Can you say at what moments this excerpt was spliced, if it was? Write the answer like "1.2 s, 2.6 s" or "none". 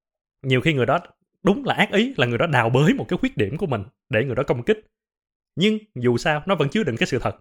none

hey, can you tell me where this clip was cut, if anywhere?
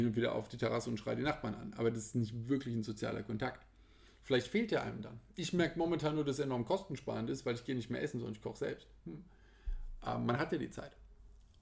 none

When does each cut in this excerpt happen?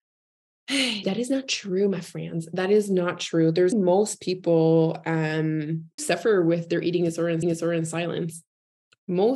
1.0 s, 3.7 s, 6.0 s, 7.4 s

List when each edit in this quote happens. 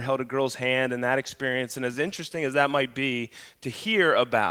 none

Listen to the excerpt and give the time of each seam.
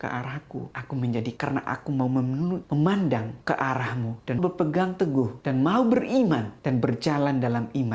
1.4 s, 4.4 s

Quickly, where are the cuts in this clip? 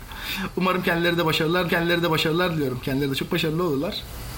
1.7 s

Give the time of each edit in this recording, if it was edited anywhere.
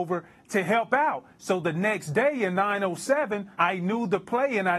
3.5 s

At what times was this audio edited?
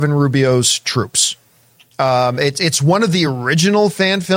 none

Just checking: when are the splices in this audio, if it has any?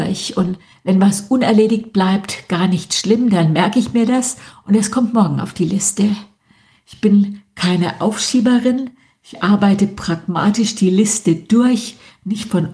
none

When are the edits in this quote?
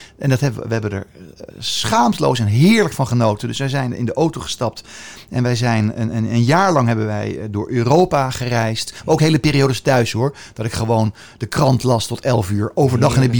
1.5 s

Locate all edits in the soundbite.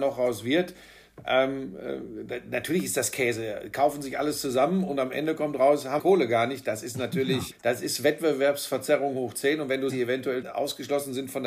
6.0 s, 7.5 s, 9.9 s, 10.4 s

